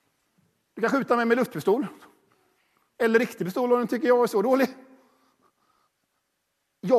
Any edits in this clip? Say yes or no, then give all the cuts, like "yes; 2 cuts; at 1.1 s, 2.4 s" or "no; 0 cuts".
no; 0 cuts